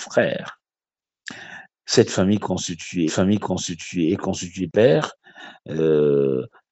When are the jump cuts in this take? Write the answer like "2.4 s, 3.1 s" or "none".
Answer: 3.1 s, 4.7 s